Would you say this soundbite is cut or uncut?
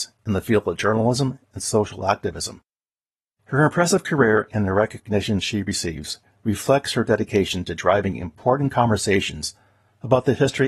uncut